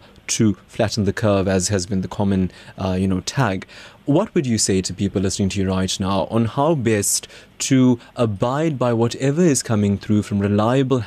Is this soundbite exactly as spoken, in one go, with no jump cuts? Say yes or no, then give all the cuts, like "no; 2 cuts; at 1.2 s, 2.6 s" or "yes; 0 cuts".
yes; 0 cuts